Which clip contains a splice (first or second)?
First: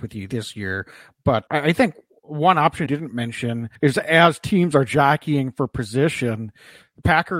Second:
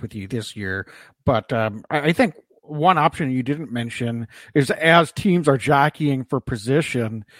first